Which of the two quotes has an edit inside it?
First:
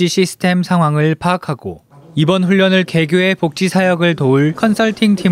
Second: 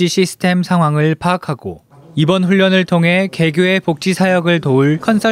first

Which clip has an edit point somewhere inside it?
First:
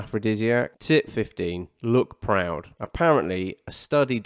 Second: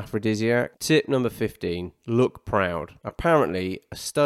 first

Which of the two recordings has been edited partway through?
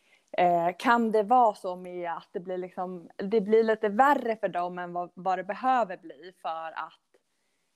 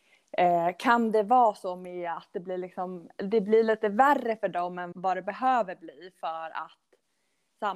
second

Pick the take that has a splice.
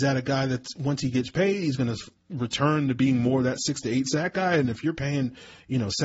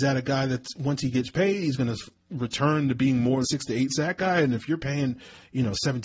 second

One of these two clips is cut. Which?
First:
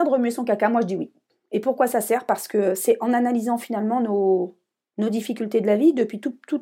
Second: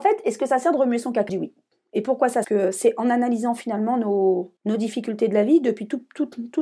second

